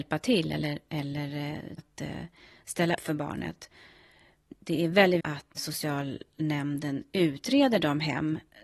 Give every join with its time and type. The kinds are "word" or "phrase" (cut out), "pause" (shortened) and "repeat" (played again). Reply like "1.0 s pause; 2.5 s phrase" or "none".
1.8 s word; 3.0 s word; 5.2 s word; 5.6 s word

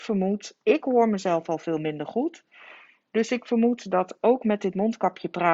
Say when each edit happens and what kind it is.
none

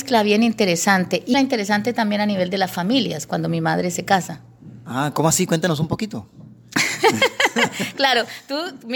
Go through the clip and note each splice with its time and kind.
1.3 s word

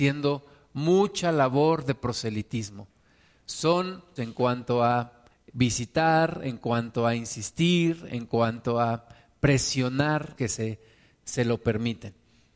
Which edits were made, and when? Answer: 4.2 s word; 5.3 s pause; 10.4 s phrase

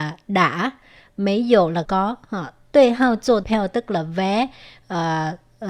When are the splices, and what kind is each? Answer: 1.8 s word; 3.4 s word

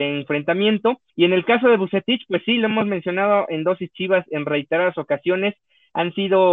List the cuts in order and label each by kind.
1.1 s pause

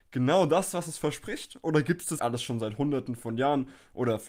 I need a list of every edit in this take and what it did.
2.2 s word

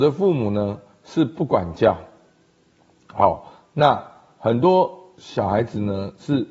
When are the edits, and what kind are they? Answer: none

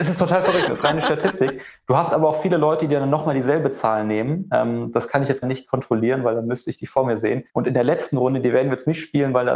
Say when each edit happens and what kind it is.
5.4 s word; 7.5 s pause

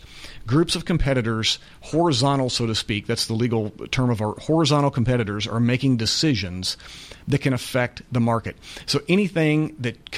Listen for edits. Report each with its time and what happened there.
none

